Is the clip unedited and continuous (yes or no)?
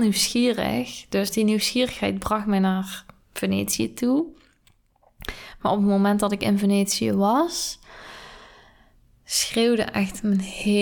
yes